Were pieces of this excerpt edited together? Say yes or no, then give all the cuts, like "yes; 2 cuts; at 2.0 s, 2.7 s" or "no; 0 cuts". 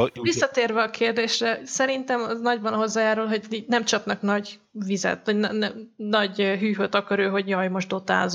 no; 0 cuts